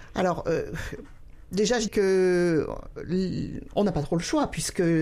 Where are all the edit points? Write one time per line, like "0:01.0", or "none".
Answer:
0:01.9